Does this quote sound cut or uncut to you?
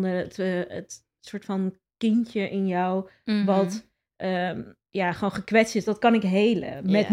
uncut